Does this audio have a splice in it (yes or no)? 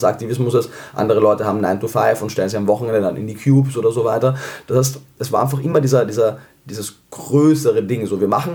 no